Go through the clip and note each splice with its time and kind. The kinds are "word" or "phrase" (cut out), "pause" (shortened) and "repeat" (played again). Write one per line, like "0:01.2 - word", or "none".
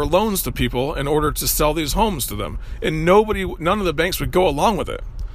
none